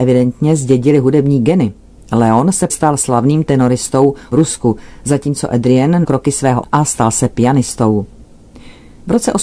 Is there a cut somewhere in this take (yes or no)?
yes